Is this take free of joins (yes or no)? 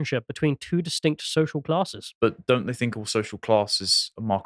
yes